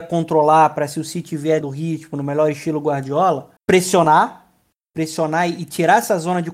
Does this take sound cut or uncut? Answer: cut